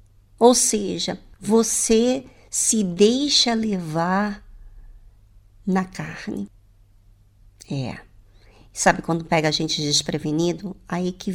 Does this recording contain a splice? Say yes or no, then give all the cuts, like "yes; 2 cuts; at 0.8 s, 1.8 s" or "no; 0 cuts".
no; 0 cuts